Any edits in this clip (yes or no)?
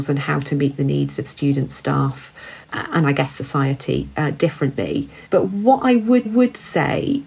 yes